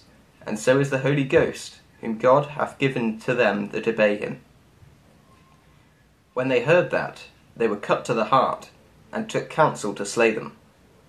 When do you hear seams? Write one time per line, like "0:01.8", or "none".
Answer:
none